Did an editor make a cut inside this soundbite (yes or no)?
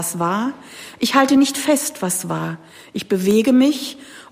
no